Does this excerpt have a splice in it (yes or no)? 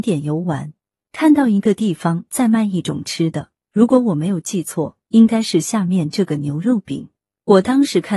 yes